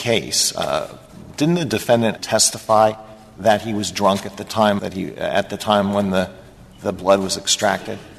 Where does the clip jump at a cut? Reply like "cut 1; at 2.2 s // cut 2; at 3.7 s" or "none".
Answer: cut 1; at 2.2 s // cut 2; at 4.8 s